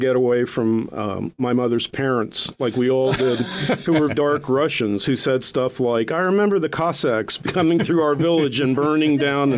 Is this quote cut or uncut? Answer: cut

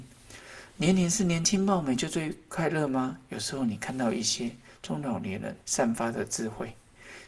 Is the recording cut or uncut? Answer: cut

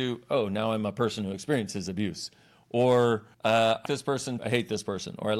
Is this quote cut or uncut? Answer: cut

